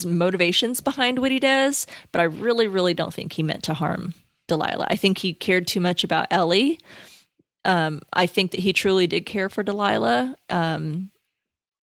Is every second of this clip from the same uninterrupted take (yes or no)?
yes